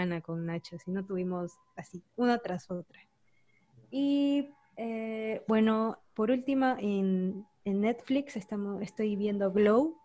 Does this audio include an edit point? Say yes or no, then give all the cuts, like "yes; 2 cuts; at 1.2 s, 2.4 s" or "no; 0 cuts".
no; 0 cuts